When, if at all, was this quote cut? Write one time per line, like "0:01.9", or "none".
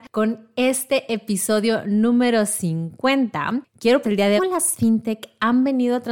0:04.0
0:04.4